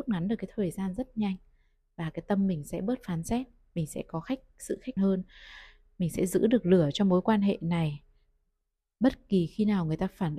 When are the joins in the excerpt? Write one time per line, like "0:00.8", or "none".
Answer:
0:05.0